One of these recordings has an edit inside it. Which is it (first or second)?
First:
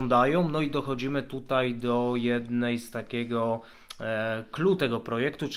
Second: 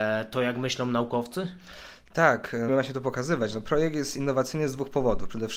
second